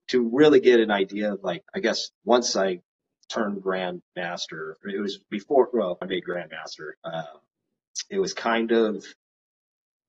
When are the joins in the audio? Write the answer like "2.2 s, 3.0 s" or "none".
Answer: 1.7 s, 2.1 s, 3.0 s, 5.2 s, 6.0 s, 6.9 s